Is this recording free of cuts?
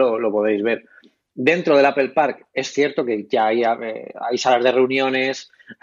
yes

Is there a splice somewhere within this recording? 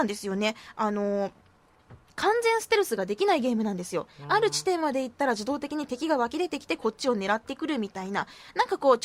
yes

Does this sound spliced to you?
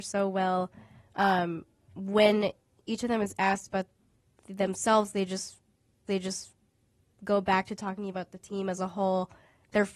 yes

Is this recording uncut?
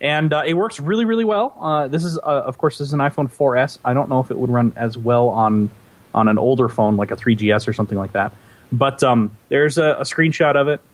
no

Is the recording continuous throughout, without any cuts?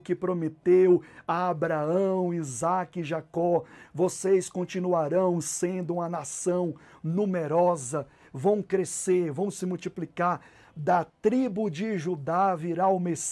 yes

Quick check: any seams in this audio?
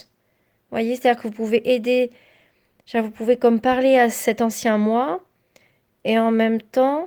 no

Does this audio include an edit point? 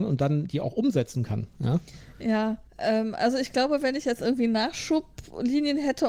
yes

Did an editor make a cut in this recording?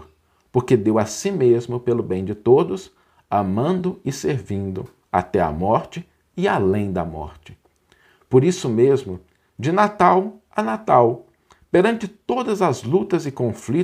no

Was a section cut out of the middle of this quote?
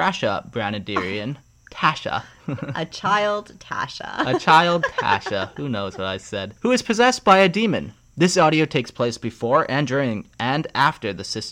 yes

